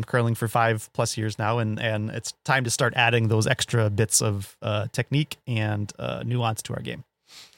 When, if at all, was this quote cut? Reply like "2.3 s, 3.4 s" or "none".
none